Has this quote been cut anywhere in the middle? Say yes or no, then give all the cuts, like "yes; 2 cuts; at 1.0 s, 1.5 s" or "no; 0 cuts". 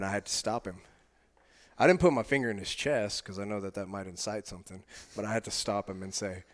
no; 0 cuts